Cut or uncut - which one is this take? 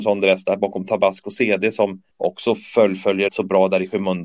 cut